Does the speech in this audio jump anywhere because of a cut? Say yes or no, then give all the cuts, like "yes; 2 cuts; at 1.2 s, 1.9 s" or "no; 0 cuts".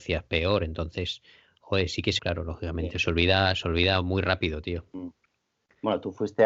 yes; 1 cut; at 2.2 s